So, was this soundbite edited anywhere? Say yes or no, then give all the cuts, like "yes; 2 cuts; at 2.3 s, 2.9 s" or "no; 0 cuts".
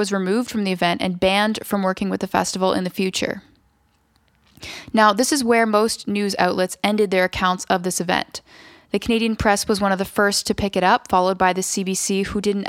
no; 0 cuts